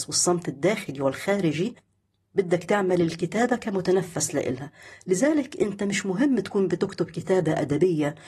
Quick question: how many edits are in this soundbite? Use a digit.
0